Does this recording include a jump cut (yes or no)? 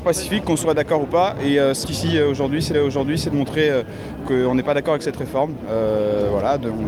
yes